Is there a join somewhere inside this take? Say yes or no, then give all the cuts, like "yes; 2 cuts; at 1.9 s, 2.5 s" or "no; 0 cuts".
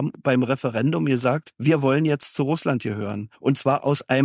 no; 0 cuts